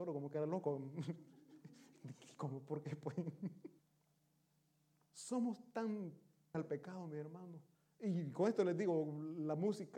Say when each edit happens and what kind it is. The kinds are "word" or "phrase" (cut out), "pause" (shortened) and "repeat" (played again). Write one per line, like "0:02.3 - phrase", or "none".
0:03.8 - pause
0:06.5 - word
0:07.7 - pause